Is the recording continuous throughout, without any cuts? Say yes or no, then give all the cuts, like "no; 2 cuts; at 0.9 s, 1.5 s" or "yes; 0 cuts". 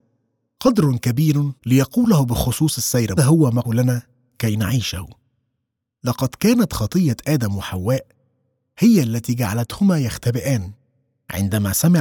no; 3 cuts; at 1.6 s, 3.2 s, 3.6 s